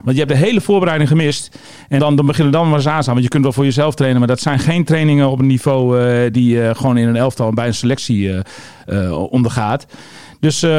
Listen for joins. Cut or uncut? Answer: cut